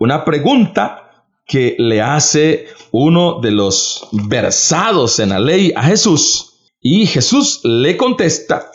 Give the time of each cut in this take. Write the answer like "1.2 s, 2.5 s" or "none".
none